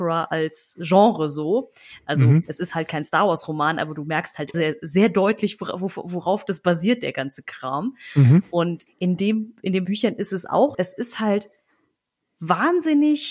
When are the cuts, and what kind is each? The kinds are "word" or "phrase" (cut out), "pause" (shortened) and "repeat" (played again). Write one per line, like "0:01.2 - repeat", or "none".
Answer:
0:04.5 - word
0:08.9 - word
0:09.9 - word
0:10.7 - word